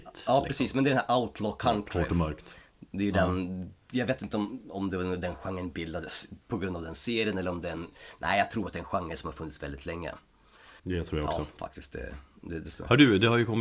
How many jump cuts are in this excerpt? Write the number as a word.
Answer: two